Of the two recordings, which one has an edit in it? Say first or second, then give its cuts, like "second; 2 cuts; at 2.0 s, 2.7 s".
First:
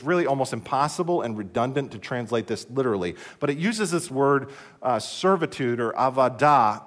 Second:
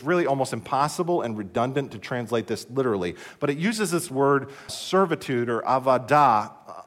second; 1 cut; at 4.7 s